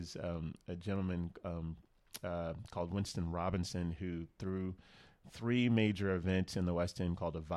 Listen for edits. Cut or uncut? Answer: uncut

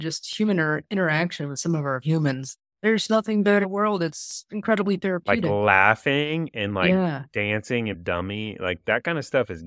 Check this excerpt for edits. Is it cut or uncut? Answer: cut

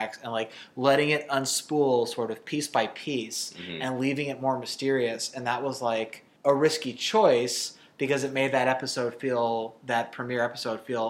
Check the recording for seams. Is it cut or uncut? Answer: cut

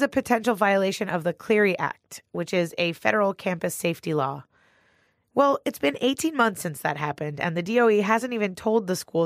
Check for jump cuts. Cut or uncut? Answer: uncut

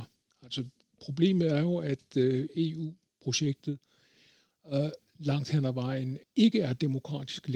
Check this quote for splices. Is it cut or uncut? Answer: uncut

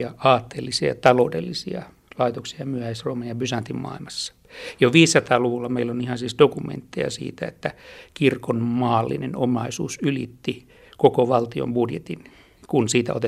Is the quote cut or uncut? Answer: uncut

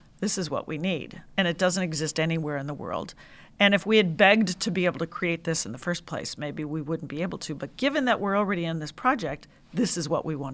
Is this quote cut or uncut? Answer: cut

